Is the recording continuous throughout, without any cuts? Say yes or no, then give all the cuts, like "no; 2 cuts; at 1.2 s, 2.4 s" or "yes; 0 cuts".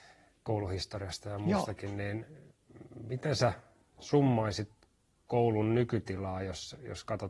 yes; 0 cuts